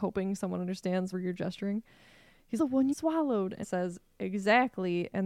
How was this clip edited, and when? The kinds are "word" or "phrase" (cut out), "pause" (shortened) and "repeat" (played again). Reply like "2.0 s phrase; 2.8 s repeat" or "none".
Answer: 1.1 s word; 2.6 s phrase; 2.9 s word; 3.6 s word